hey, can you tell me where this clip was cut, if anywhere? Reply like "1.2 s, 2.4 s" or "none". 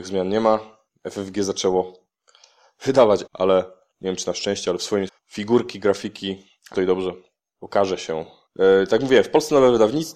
3.3 s, 5.1 s, 6.7 s